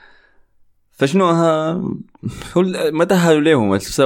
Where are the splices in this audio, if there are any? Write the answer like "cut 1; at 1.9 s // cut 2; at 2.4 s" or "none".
none

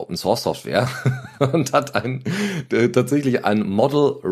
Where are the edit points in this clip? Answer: none

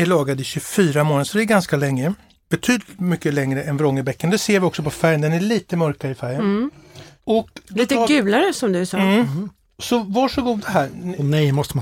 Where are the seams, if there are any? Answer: none

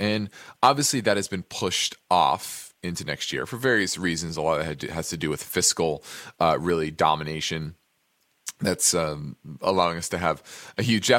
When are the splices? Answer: none

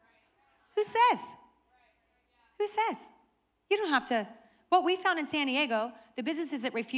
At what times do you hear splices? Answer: none

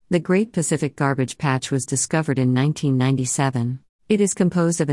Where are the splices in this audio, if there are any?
cut 1; at 4.0 s

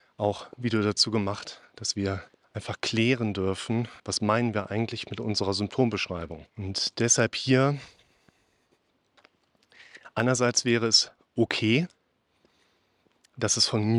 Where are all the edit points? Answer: cut 1; at 2.3 s // cut 2; at 4.0 s // cut 3; at 6.5 s

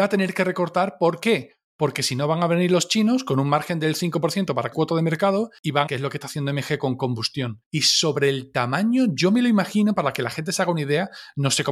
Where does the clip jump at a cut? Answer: cut 1; at 4.7 s // cut 2; at 5.9 s

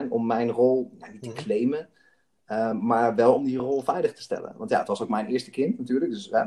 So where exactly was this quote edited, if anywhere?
none

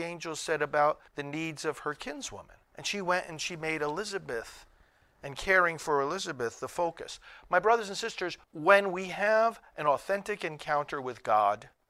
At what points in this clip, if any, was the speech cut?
cut 1; at 1.1 s // cut 2; at 2.6 s // cut 3; at 8.4 s

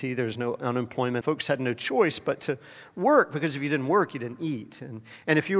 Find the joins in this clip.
cut 1; at 1.2 s

